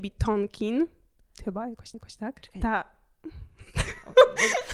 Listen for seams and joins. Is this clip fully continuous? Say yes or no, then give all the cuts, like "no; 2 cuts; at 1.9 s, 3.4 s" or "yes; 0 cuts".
no; 1 cut; at 1.9 s